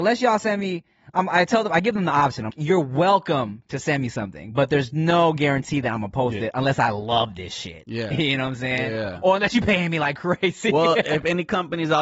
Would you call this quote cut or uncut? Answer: cut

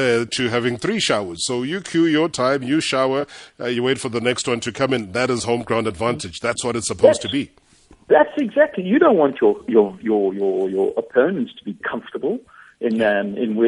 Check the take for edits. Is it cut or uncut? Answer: uncut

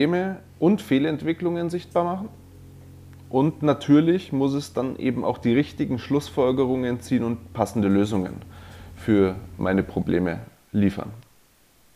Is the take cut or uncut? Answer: uncut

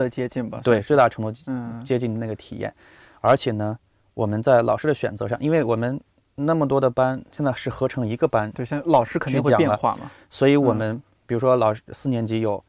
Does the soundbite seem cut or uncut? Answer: uncut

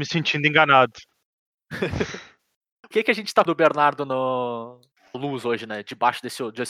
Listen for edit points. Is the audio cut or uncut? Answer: cut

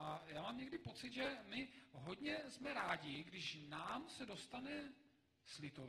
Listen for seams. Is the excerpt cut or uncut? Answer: uncut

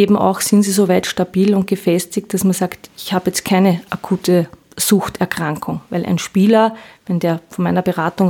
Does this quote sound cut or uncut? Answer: uncut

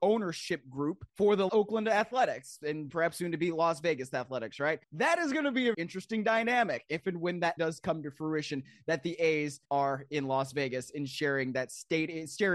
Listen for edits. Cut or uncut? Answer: cut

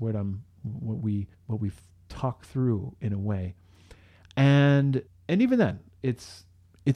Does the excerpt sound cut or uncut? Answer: cut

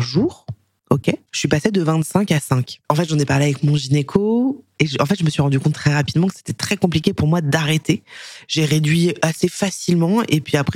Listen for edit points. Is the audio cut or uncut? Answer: cut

